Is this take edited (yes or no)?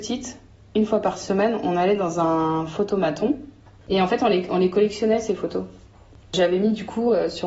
no